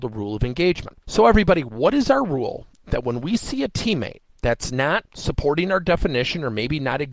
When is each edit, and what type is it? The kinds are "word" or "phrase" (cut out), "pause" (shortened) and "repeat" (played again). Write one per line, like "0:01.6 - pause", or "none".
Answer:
0:01.0 - pause
0:04.3 - pause
0:05.1 - pause